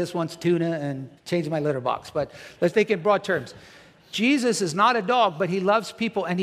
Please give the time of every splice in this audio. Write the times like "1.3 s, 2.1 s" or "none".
1.2 s, 2.7 s